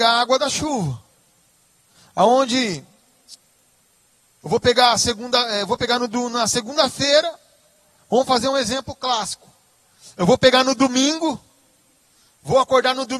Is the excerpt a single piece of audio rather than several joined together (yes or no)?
yes